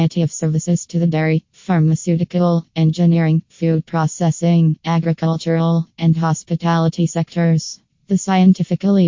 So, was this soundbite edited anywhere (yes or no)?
no